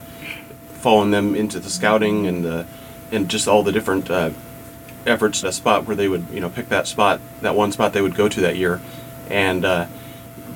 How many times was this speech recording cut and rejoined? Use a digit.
2